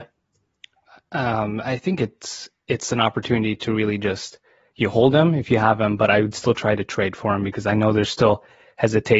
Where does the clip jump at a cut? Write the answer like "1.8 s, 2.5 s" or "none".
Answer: none